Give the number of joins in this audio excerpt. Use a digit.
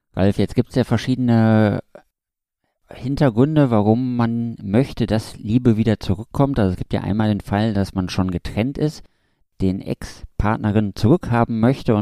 0